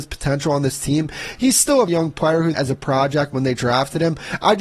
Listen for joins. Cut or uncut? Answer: cut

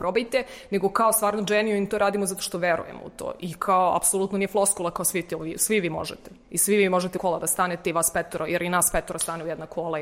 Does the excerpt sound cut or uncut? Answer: cut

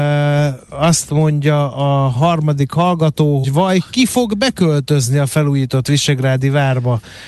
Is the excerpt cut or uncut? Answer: cut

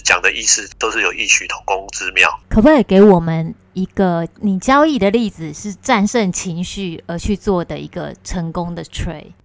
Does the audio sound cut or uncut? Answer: cut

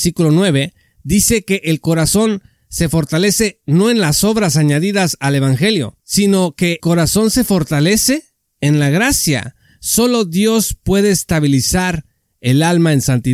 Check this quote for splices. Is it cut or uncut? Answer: cut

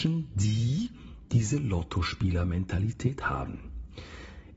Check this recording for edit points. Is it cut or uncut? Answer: uncut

